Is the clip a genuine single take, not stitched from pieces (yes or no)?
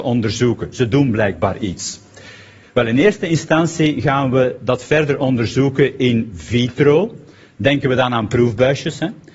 yes